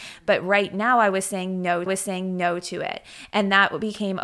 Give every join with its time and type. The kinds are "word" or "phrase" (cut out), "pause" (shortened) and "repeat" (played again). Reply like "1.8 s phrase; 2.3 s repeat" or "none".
1.9 s repeat